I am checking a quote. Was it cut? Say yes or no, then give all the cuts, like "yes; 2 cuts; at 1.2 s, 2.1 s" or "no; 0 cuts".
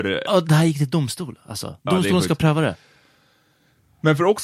no; 0 cuts